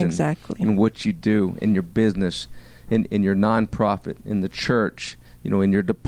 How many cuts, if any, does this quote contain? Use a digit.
0